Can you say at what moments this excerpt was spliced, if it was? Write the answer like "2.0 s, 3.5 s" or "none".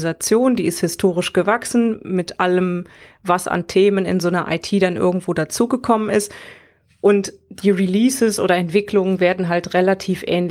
none